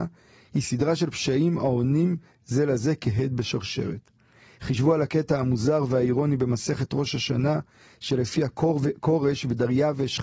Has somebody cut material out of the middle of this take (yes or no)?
no